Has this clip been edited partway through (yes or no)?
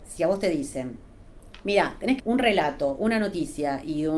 yes